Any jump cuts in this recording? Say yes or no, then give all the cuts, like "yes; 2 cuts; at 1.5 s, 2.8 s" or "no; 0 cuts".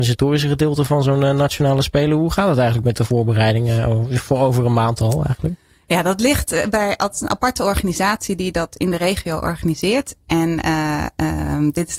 no; 0 cuts